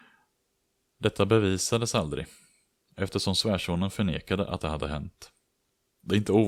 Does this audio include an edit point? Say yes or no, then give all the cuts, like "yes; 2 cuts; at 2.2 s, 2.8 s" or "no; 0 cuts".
no; 0 cuts